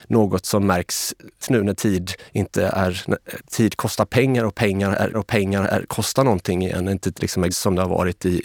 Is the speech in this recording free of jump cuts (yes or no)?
no